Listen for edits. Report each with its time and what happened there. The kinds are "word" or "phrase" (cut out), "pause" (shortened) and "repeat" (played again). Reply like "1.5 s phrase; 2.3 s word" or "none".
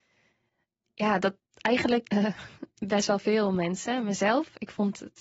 2.1 s word